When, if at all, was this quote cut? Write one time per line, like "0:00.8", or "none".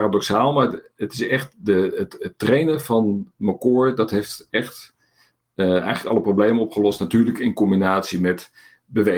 none